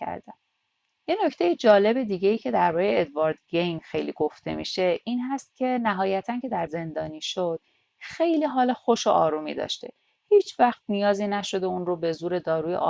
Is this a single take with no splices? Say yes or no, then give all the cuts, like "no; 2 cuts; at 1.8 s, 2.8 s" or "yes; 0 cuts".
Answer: no; 1 cut; at 6.7 s